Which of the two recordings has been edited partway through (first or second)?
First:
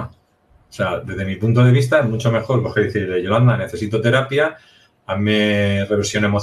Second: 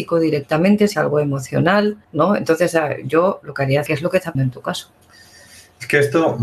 second